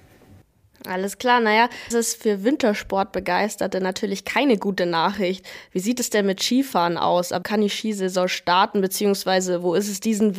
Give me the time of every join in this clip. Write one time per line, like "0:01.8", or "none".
0:01.9
0:07.4